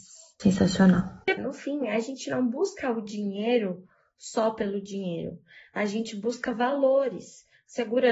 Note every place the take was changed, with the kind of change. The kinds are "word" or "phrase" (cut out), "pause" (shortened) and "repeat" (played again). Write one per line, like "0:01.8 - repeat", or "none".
0:01.4 - word